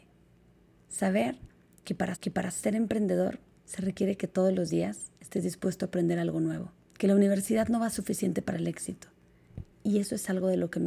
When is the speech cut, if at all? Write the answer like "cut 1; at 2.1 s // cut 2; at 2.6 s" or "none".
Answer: cut 1; at 2.1 s // cut 2; at 6.8 s // cut 3; at 7.9 s // cut 4; at 8.5 s // cut 5; at 9.7 s